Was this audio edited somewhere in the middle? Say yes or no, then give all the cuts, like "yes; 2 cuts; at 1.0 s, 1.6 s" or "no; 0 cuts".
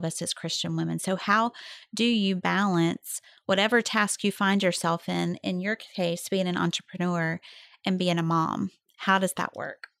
no; 0 cuts